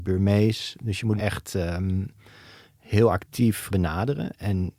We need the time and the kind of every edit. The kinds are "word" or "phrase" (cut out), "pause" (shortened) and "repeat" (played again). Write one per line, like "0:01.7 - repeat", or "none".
0:01.2 - word
0:03.7 - word